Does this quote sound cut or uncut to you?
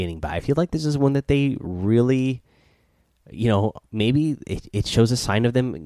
uncut